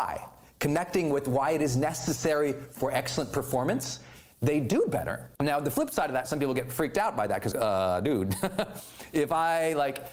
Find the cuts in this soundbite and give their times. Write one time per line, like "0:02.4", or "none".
0:05.3
0:07.5